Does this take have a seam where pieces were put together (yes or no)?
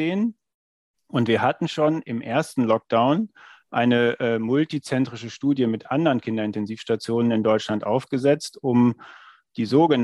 no